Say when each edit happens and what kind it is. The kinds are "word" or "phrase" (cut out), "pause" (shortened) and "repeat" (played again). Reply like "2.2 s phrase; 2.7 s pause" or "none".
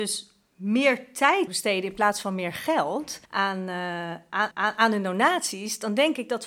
1.5 s word; 3.2 s pause; 4.5 s repeat

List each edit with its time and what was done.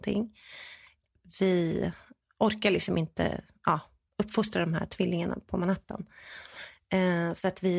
none

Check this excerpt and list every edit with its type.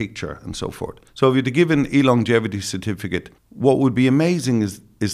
1.1 s pause; 3.4 s pause

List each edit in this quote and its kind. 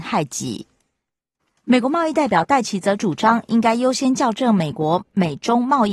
1.4 s pause

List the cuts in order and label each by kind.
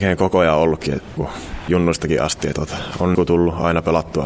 1.2 s word; 1.7 s word; 2.5 s word; 3.1 s word

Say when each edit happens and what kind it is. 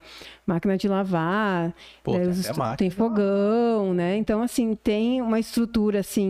none

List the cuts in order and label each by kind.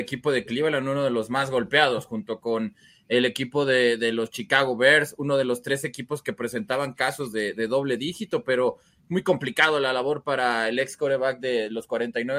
none

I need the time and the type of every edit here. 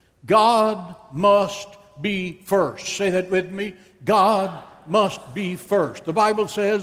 none

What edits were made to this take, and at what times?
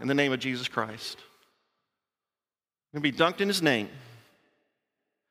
none

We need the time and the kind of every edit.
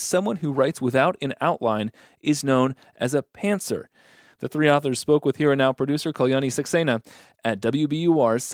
none

